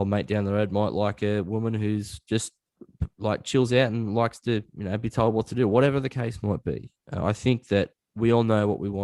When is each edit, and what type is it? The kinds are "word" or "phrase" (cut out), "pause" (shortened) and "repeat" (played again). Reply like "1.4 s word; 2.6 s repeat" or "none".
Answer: 4.7 s pause; 7.0 s pause